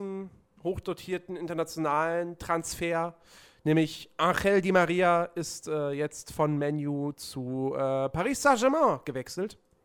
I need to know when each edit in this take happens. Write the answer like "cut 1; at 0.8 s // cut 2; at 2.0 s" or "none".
none

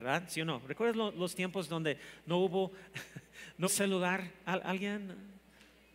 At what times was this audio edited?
cut 1; at 3.6 s

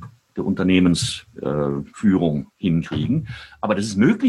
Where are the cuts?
cut 1; at 1.9 s

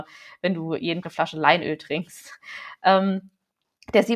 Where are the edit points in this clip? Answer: cut 1; at 1.0 s

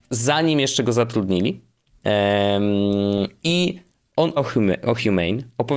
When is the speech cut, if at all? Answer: cut 1; at 4.4 s

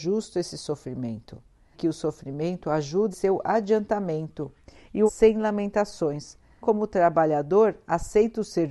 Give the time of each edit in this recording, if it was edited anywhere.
cut 1; at 1.7 s // cut 2; at 3.1 s // cut 3; at 5.1 s // cut 4; at 6.6 s

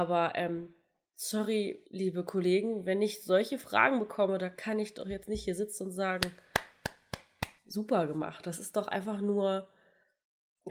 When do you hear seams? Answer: cut 1; at 1.9 s // cut 2; at 7.6 s

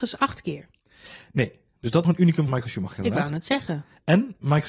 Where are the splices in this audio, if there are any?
cut 1; at 2.0 s // cut 2; at 2.5 s

